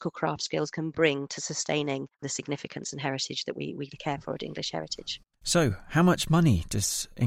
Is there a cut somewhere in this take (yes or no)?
yes